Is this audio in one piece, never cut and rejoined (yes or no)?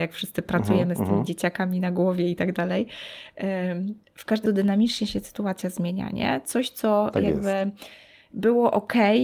no